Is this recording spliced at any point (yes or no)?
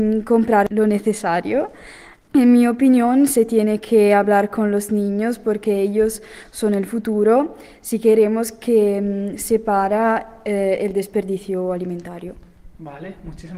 no